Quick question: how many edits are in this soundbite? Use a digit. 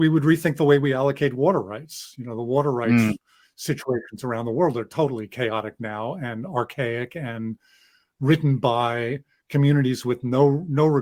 0